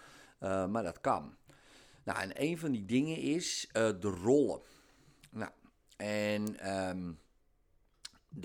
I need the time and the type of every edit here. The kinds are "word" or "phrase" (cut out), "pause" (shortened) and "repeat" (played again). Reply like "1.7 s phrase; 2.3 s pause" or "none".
none